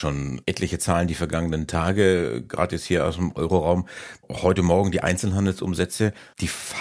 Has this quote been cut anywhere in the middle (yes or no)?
no